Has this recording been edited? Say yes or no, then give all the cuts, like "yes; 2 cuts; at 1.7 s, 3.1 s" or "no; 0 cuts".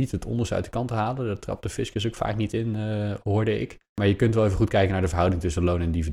no; 0 cuts